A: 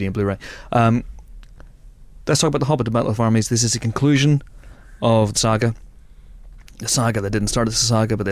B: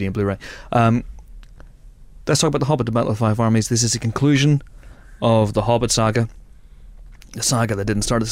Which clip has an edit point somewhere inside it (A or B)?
A